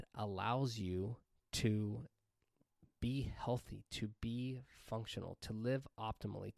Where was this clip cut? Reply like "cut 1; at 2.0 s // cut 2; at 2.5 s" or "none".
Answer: none